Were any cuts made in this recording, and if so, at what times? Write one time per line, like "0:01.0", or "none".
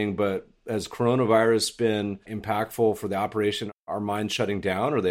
0:02.2